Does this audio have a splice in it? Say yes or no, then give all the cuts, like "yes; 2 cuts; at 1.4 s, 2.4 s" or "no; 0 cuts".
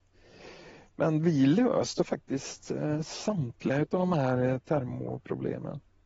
no; 0 cuts